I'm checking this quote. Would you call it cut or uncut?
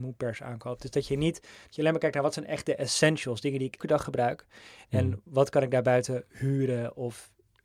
cut